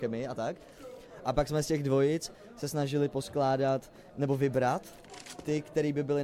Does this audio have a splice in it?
no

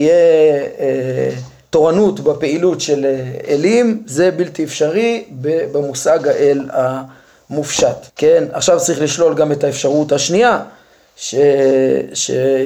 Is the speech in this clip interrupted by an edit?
yes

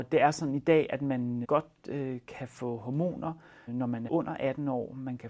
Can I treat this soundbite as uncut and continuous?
no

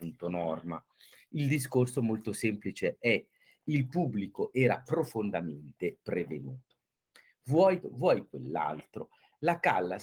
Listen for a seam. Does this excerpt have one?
yes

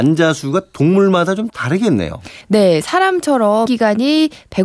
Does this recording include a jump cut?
yes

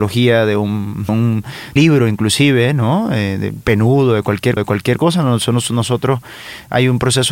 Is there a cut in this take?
yes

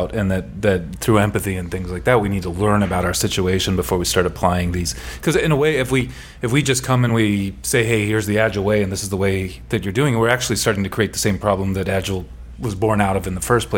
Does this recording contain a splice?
no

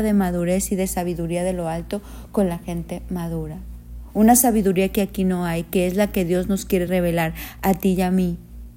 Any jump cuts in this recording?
no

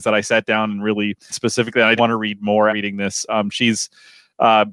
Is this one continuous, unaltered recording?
no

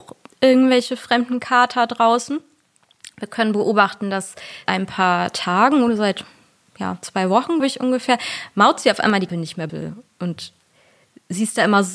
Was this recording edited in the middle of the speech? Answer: yes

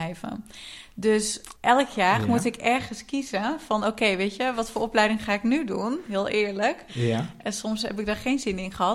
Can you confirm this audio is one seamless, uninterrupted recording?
no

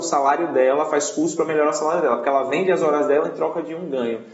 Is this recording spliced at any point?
no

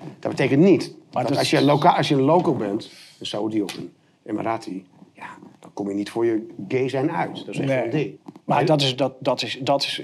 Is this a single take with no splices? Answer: no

